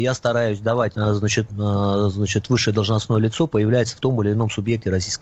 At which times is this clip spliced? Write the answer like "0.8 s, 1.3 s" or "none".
0.9 s, 1.5 s

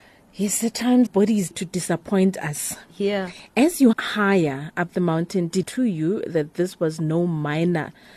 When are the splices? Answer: 1.1 s, 1.5 s, 3.9 s, 5.6 s

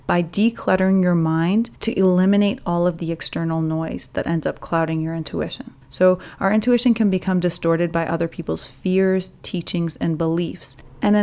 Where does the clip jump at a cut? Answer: 1.8 s, 5.8 s

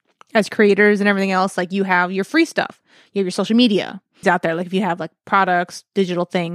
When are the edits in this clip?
4.2 s

